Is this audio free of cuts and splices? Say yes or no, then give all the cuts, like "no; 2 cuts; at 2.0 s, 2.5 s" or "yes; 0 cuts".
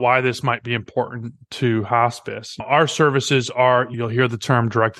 no; 2 cuts; at 2.6 s, 3.9 s